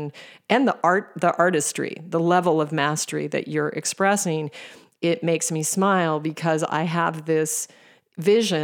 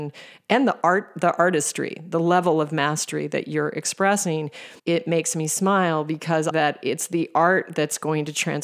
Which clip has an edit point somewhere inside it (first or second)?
second